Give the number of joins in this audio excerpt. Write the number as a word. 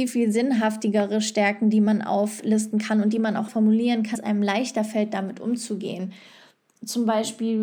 two